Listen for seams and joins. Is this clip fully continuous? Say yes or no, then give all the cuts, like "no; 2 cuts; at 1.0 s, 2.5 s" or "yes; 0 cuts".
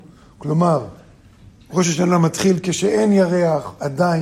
yes; 0 cuts